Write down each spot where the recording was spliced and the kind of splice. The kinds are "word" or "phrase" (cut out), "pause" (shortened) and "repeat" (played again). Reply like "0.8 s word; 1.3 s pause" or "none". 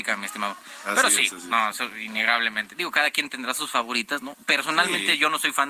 none